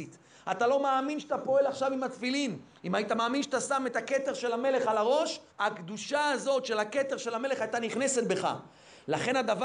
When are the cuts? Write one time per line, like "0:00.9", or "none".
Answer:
0:05.5